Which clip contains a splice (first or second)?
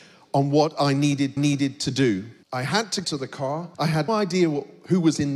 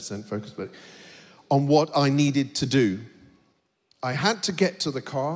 first